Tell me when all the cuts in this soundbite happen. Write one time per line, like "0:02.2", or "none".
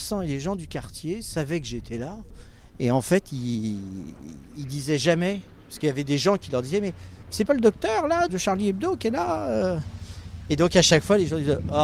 0:07.5
0:08.3